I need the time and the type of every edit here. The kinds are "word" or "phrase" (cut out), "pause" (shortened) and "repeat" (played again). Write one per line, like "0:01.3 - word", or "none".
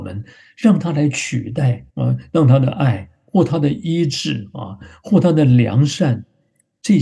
0:01.9 - pause